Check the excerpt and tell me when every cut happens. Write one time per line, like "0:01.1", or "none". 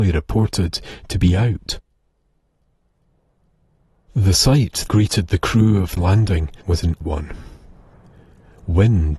0:04.9
0:06.0
0:06.6
0:07.0